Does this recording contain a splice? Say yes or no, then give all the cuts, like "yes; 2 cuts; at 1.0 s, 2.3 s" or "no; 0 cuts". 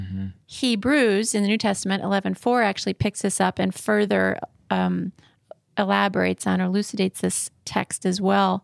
no; 0 cuts